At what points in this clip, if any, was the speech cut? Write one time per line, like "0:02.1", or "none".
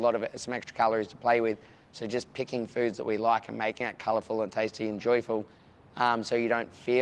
none